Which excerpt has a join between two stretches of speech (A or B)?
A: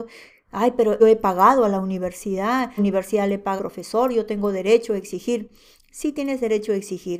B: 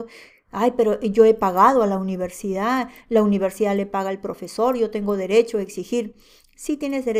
A